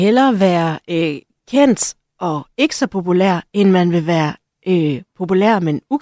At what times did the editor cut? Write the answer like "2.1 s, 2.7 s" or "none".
none